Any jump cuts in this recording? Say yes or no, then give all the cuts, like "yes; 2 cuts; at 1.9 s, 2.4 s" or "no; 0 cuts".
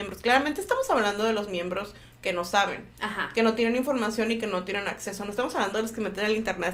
no; 0 cuts